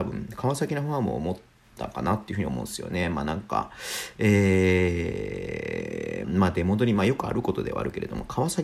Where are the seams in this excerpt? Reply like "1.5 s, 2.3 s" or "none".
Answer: 6.2 s